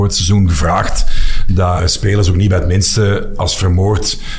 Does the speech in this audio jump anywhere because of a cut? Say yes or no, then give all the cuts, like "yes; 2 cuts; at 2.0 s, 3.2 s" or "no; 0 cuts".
yes; 1 cut; at 1.8 s